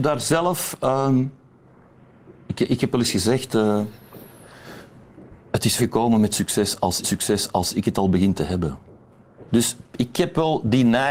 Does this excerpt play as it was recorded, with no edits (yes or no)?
no